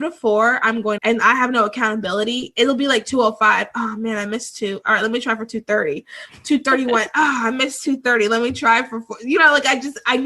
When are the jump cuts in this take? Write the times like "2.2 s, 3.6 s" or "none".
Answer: 1.0 s